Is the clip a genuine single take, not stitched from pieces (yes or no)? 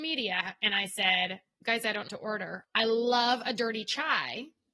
no